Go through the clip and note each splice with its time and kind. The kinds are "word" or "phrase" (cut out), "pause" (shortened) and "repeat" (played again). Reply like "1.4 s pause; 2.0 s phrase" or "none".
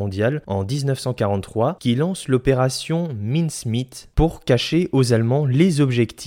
1.8 s phrase